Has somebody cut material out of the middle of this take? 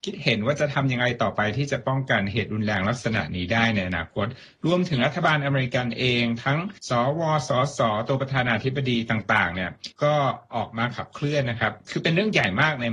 yes; 2 cuts; at 6.8 s, 9.9 s

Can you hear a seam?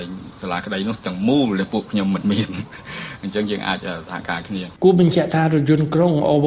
yes; 1 cut; at 4.8 s

